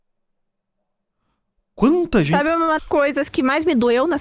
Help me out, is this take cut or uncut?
cut